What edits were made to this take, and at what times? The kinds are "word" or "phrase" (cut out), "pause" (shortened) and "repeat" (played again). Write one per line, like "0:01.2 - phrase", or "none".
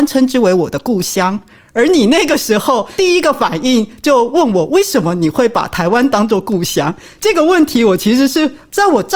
none